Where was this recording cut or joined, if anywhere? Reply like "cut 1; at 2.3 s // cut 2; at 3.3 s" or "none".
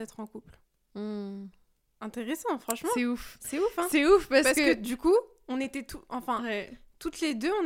none